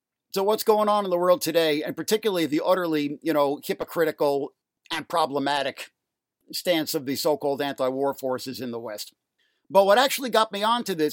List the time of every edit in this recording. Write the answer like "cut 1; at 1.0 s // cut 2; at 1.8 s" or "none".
cut 1; at 4.6 s